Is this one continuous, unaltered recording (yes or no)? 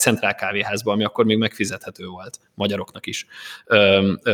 yes